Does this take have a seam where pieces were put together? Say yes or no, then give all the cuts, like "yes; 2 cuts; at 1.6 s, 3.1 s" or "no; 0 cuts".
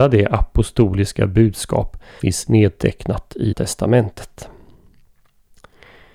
yes; 2 cuts; at 2.2 s, 3.5 s